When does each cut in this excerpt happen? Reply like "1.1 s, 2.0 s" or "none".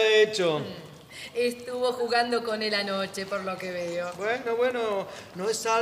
none